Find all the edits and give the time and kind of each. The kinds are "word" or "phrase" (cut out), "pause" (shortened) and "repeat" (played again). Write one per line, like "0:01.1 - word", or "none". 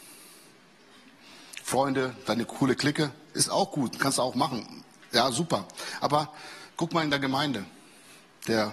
0:06.7 - pause